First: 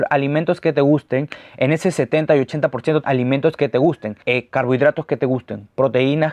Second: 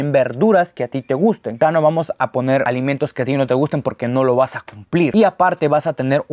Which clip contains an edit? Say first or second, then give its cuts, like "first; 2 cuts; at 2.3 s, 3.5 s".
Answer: first; 2 cuts; at 3.0 s, 4.2 s